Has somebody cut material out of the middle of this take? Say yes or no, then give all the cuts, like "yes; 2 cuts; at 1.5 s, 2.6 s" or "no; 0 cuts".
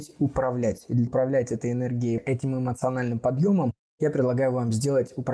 yes; 2 cuts; at 1.1 s, 2.2 s